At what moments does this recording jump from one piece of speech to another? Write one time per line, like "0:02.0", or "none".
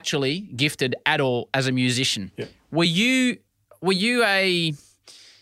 none